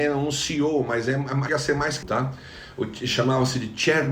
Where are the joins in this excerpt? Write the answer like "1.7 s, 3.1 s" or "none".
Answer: 1.5 s, 2.0 s